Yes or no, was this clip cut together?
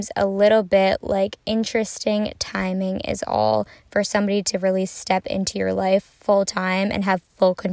no